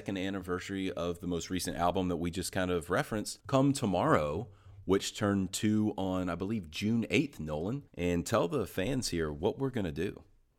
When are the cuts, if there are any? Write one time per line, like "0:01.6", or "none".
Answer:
0:03.4
0:07.9